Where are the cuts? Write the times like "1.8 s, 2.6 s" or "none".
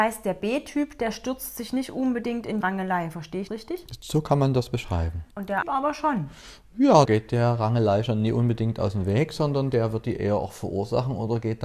2.6 s, 3.5 s, 5.3 s, 5.6 s, 7.1 s